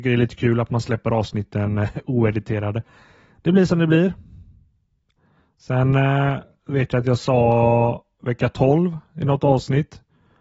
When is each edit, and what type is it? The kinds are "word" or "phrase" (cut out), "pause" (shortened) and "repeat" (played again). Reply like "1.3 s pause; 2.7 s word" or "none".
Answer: none

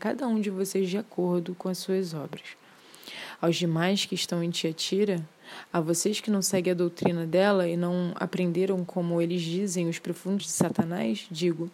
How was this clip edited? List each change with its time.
10.4 s word

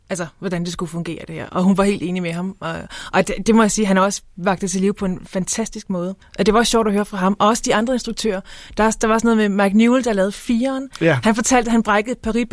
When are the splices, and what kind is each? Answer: 6.2 s pause

